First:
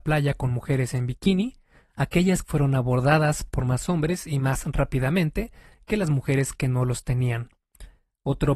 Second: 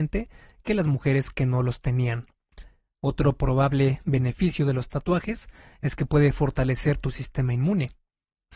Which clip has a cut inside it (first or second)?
first